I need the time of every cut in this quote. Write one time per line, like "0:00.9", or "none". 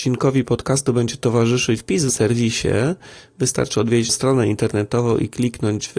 0:01.8
0:02.1
0:04.1